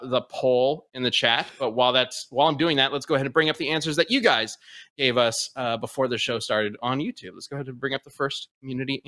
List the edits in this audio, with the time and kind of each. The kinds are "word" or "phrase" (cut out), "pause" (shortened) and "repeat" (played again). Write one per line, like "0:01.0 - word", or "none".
none